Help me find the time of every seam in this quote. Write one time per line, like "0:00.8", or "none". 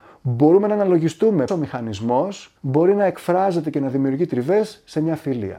0:01.5
0:02.6